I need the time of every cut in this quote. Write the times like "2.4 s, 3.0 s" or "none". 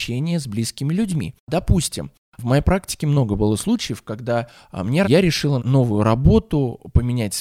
5.0 s, 5.6 s